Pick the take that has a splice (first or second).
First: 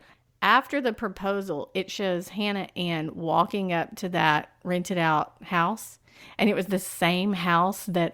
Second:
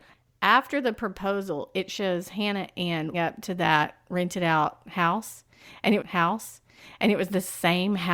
second